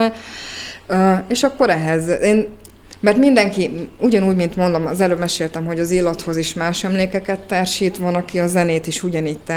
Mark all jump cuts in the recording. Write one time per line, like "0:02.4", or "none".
none